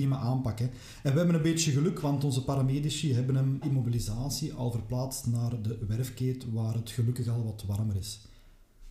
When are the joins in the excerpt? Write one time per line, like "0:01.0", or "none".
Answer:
0:03.6